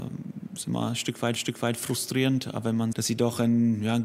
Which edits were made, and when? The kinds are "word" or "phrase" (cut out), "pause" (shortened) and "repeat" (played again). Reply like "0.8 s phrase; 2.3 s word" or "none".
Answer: 1.4 s repeat; 2.9 s word